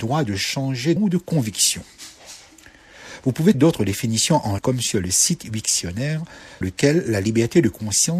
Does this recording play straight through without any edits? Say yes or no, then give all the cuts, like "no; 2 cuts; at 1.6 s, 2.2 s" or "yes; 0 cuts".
no; 4 cuts; at 1.0 s, 3.5 s, 4.6 s, 6.6 s